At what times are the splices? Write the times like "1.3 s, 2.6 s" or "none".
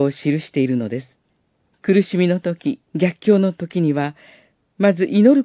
1.3 s, 2.9 s

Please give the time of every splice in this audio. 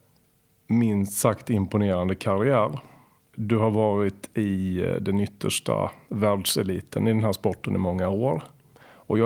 none

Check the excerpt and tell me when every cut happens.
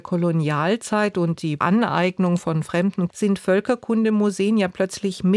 1.6 s, 3.1 s

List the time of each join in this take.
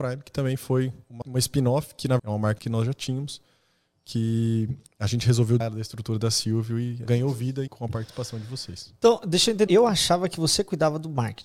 1.2 s, 2.2 s, 2.6 s, 5.6 s, 7.0 s, 7.7 s, 9.7 s

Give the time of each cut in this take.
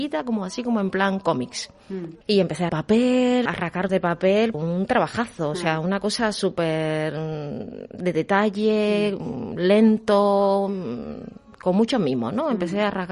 2.2 s, 2.7 s, 3.5 s, 3.9 s, 4.5 s

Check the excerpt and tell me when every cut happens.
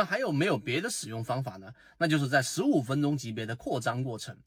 none

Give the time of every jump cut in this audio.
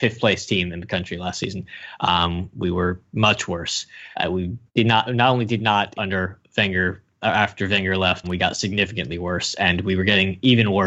4.1 s, 4.7 s, 5.9 s, 8.2 s

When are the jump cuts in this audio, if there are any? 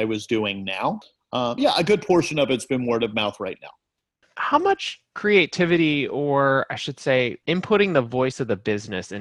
1.6 s, 7.4 s

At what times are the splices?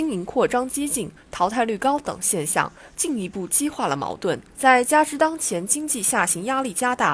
4.5 s

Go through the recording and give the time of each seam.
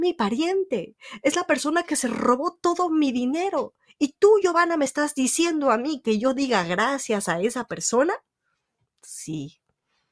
none

